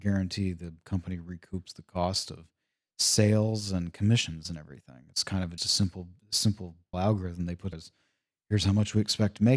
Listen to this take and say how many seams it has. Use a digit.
3